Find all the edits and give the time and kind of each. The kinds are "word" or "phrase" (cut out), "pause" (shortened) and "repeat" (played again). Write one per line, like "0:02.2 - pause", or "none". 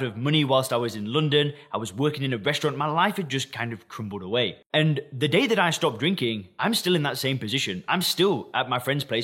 none